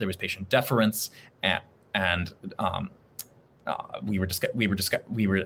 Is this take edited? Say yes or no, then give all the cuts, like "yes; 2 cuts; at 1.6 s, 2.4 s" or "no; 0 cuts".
no; 0 cuts